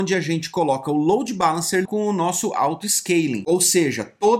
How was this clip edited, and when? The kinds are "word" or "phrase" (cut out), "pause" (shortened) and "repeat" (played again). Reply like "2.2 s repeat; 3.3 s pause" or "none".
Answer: 1.8 s word